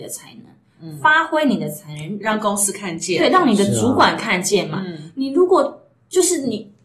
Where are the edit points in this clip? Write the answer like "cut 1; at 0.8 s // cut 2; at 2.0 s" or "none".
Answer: none